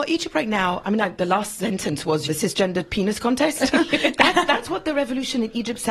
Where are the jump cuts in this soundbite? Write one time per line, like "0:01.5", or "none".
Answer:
0:01.2
0:02.3